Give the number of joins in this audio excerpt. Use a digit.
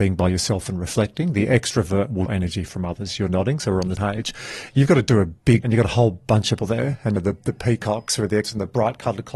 6